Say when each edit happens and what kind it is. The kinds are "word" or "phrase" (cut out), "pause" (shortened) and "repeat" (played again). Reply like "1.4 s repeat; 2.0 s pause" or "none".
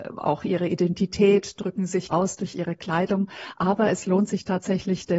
2.1 s word